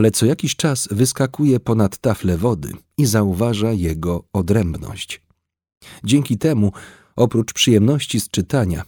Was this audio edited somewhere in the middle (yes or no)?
no